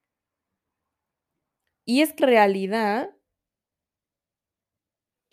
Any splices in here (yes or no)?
yes